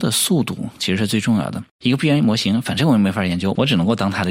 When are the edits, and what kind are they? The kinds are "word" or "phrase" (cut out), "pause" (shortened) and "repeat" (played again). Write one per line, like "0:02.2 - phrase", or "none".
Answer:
0:01.7 - pause